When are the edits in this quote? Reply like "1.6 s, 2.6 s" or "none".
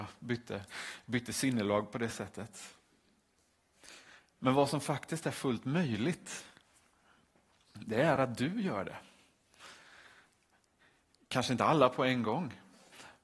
none